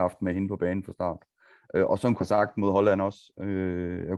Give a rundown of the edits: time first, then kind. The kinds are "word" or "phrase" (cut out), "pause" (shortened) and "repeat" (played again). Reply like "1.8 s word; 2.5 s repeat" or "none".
2.2 s word